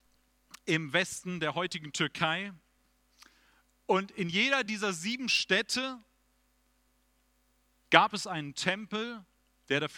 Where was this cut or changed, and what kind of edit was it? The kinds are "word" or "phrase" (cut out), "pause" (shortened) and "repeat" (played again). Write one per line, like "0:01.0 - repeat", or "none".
none